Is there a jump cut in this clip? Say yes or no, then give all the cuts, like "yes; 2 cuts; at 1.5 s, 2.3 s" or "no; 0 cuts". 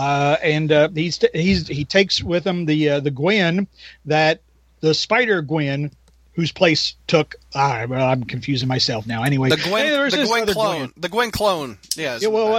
no; 0 cuts